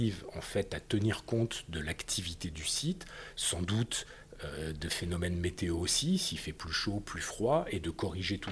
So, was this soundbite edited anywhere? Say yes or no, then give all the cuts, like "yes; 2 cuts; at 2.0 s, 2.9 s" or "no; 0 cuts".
no; 0 cuts